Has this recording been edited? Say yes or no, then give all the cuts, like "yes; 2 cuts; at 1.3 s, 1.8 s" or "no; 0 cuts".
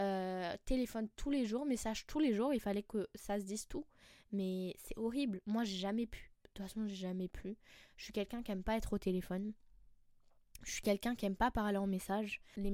no; 0 cuts